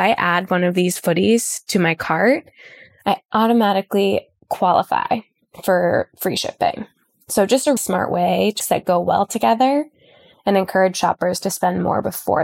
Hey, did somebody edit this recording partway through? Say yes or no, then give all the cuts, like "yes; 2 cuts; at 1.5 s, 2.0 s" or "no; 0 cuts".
yes; 2 cuts; at 7.8 s, 8.6 s